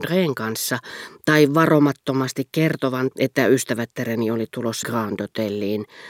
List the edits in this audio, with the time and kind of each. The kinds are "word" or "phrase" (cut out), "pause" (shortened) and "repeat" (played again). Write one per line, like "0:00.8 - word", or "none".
0:03.1 - word
0:04.8 - word